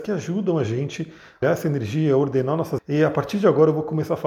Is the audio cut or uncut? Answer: cut